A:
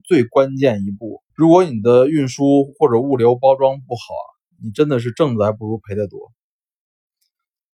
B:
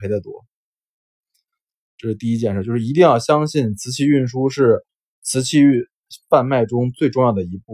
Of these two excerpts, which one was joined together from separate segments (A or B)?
A